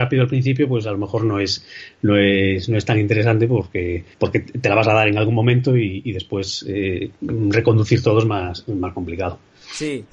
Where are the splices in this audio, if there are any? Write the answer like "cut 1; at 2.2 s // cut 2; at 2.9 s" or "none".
cut 1; at 4.1 s